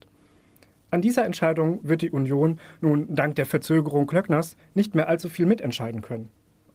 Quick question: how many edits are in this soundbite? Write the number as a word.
zero